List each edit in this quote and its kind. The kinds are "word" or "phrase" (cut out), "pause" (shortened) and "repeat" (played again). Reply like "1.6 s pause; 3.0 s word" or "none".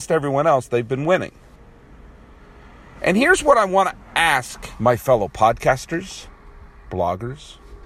none